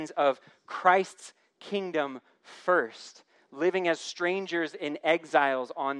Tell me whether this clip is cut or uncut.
uncut